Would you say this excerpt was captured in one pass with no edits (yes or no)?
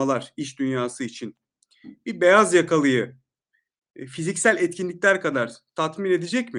yes